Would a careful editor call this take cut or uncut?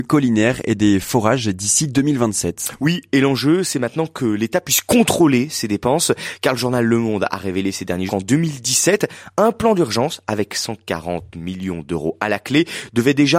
cut